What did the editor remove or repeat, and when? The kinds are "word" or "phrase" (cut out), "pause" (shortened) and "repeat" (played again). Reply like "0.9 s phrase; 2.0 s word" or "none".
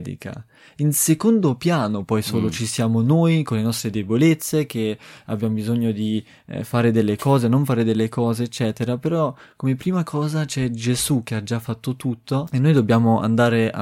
none